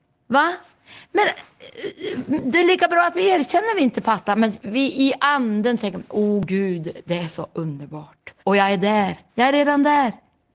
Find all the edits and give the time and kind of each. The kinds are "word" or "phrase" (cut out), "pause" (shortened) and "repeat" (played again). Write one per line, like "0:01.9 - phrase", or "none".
0:08.4 - pause
0:09.3 - pause

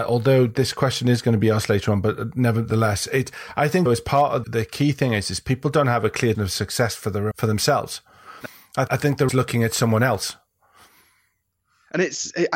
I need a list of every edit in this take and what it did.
0:03.9 - word
0:04.4 - word
0:06.3 - word
0:07.3 - word
0:08.9 - word
0:09.3 - word

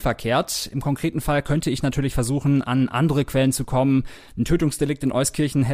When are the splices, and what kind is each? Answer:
none

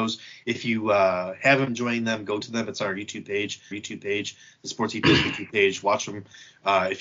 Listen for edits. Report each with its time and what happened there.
0:01.7 - word
0:02.4 - word
0:03.7 - repeat

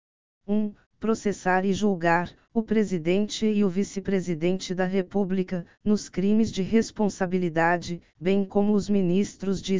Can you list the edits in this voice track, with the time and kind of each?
none

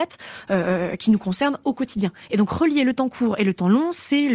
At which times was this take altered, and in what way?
none

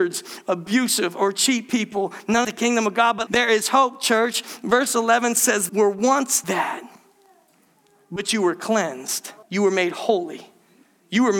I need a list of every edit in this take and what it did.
0:02.4 - phrase
0:03.3 - word
0:05.7 - phrase
0:06.4 - word
0:09.4 - pause

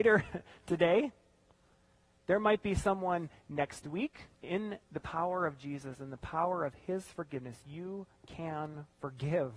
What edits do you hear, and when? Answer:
0:04.3 - pause

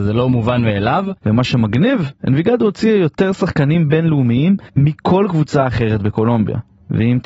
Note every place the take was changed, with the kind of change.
0:01.2 - pause
0:02.2 - pause
0:04.7 - pause

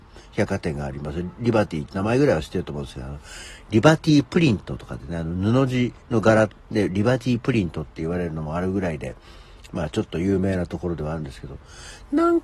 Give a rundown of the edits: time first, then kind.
0:06.0 - pause

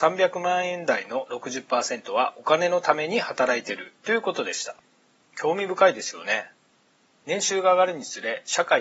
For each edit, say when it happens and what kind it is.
none

